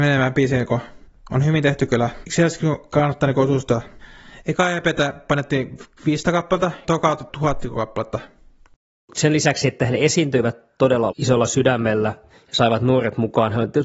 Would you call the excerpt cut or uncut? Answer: cut